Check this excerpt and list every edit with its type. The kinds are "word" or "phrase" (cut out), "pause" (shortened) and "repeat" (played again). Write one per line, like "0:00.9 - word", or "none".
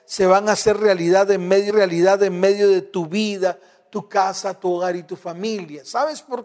0:01.7 - repeat

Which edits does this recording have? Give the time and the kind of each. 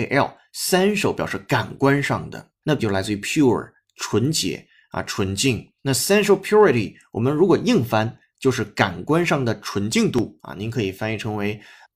0:02.8 - word

